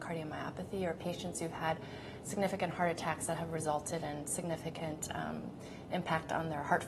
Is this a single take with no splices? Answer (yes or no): yes